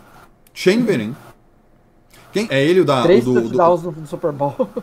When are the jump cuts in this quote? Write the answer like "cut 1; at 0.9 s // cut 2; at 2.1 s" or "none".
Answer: cut 1; at 2.5 s